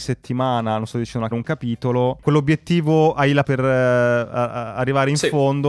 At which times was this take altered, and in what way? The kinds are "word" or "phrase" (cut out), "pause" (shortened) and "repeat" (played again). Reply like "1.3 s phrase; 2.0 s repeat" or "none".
0.9 s word; 1.3 s phrase; 2.2 s word; 3.4 s word